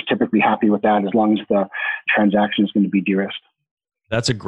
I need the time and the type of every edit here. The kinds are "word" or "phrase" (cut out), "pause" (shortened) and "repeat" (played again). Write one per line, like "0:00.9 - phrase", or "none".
none